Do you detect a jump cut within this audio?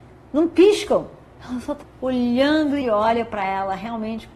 yes; 2 cuts; at 1.8 s, 2.8 s

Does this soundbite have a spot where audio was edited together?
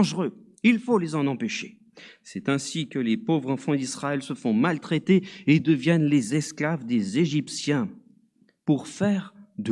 no; 0 cuts

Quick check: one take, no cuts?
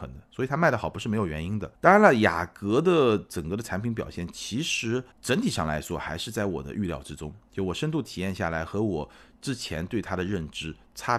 no; 2 cuts; at 1.7 s, 5.1 s

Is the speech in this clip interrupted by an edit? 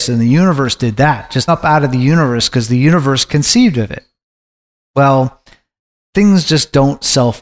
yes; 1 cut; at 1.5 s

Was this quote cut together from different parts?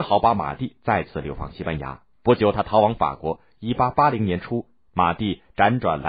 yes; 1 cut; at 2.1 s

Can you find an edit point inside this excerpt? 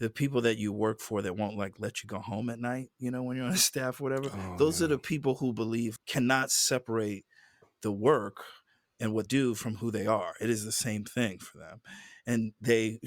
yes; 2 cuts; at 6.0 s, 9.3 s

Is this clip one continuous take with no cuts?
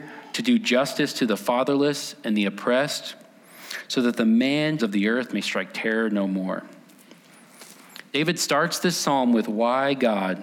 no; 1 cut; at 4.8 s

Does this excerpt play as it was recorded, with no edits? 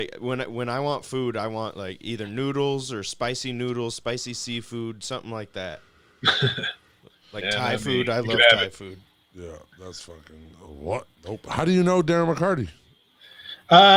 no; 1 cut; at 11.1 s

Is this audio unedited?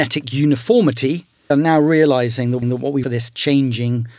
no; 3 cuts; at 1.5 s, 2.6 s, 3.0 s

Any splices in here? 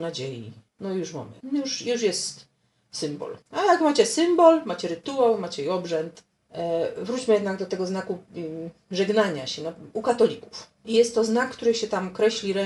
yes; 3 cuts; at 1.4 s, 3.4 s, 10.7 s

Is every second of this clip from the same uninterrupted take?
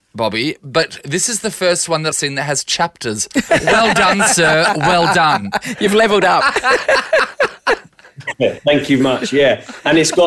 no; 2 cuts; at 2.1 s, 9.0 s

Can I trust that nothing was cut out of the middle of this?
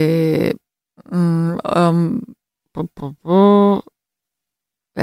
yes; 0 cuts

